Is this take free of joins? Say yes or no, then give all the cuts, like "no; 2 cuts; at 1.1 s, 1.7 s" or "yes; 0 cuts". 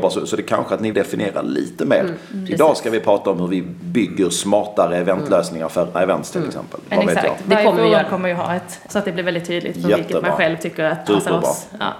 no; 4 cuts; at 0.9 s, 5.9 s, 8.9 s, 11.1 s